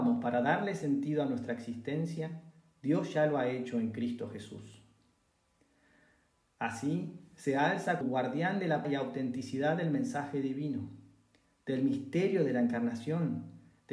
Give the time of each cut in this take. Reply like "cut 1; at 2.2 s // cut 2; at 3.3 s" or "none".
cut 1; at 8.0 s // cut 2; at 8.8 s

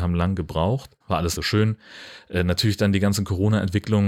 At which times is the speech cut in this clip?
cut 1; at 1.0 s // cut 2; at 1.4 s

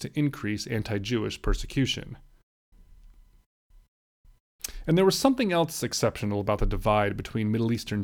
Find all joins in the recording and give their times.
none

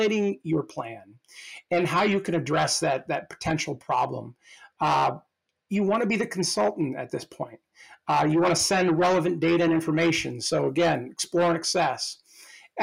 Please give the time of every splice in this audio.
none

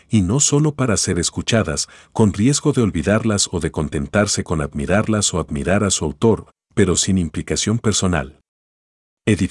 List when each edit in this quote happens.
none

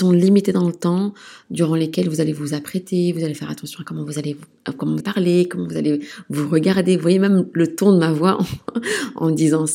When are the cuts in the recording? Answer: cut 1; at 5.0 s

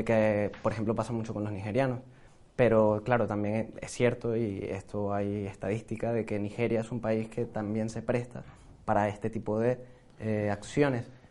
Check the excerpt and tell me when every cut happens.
none

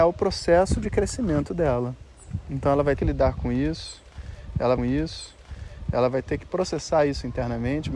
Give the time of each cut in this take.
cut 1; at 3.0 s // cut 2; at 4.8 s

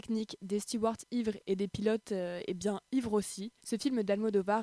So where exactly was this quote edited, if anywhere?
cut 1; at 3.6 s

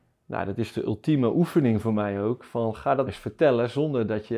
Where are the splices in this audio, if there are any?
cut 1; at 3.1 s

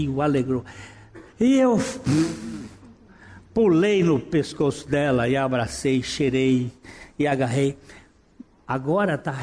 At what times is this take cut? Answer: cut 1; at 1.3 s

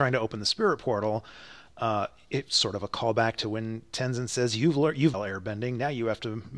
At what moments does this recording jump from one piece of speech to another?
cut 1; at 5.1 s

